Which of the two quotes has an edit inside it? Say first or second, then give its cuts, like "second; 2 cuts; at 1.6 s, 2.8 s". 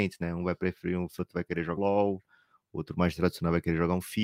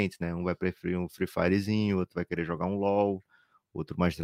first; 2 cuts; at 1.2 s, 1.8 s